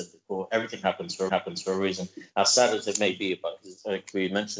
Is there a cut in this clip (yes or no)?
yes